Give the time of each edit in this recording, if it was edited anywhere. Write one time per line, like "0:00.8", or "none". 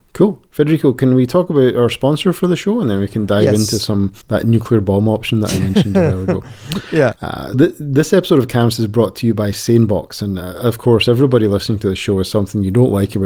0:04.2
0:07.5